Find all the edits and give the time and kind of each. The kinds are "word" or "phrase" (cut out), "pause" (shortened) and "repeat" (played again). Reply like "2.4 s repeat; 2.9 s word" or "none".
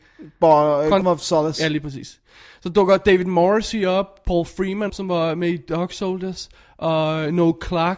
1.0 s word; 4.9 s word